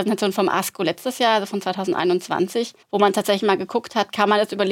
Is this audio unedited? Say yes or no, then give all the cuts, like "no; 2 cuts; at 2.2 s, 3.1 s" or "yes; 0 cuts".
no; 1 cut; at 2.8 s